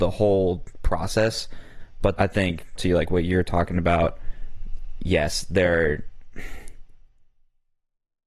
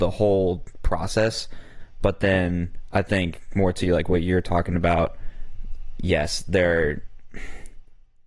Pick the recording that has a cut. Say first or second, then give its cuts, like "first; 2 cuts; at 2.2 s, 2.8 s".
first; 2 cuts; at 2.2 s, 2.8 s